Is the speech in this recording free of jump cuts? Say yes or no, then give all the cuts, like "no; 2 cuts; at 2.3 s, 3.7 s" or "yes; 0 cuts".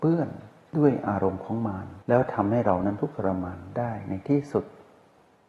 no; 1 cut; at 2.0 s